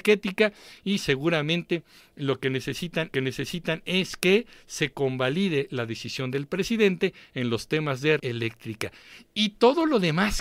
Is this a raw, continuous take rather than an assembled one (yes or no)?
no